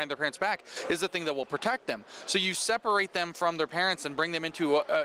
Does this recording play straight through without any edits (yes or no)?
yes